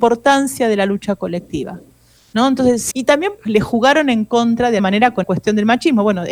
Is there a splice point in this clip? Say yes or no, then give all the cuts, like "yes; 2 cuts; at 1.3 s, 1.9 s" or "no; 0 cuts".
yes; 4 cuts; at 2.9 s, 3.4 s, 4.8 s, 5.2 s